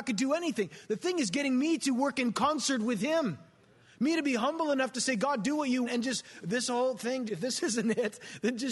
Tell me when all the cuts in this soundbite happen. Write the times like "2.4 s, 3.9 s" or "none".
5.8 s, 7.3 s